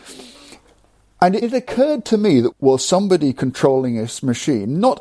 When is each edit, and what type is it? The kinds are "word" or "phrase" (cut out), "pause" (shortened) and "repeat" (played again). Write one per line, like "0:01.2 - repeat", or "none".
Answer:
0:01.4 - word
0:02.5 - phrase

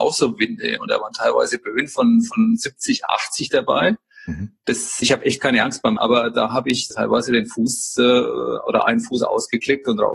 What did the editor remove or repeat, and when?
0:05.0 - word
0:06.0 - word
0:06.9 - word

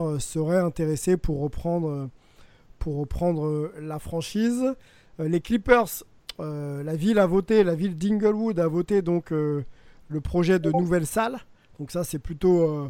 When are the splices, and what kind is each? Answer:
none

